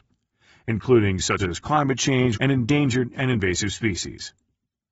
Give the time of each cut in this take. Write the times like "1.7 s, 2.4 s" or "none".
1.4 s, 2.3 s